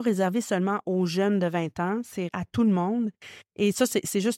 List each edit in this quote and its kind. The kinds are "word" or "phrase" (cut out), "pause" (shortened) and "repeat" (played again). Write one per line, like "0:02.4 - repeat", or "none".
0:02.3 - word